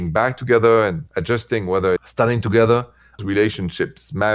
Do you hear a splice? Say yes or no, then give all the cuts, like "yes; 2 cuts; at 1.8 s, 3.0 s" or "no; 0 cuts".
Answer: yes; 3 cuts; at 1.1 s, 2.0 s, 3.2 s